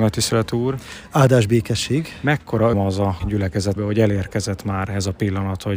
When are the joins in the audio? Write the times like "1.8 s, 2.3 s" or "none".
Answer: 2.7 s, 3.2 s, 3.8 s